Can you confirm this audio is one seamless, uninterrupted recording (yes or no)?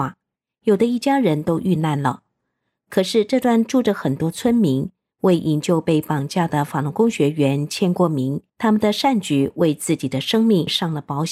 no